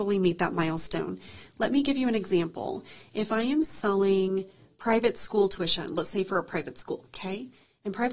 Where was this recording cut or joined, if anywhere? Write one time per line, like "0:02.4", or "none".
none